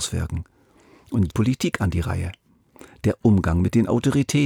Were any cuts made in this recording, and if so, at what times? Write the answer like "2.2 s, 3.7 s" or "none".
1.3 s